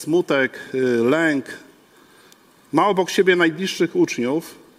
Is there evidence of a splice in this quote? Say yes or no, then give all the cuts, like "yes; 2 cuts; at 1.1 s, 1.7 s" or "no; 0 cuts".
no; 0 cuts